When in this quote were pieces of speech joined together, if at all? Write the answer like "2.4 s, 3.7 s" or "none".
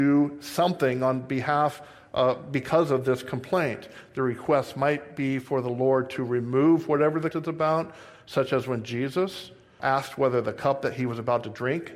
7.3 s, 9.8 s